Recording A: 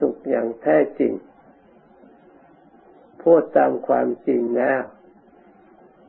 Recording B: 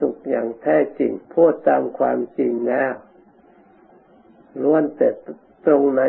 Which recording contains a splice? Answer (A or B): B